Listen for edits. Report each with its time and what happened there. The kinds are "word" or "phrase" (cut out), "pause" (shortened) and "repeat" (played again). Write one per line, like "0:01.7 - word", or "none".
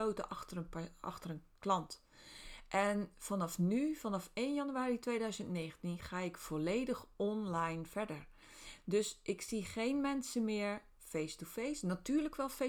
none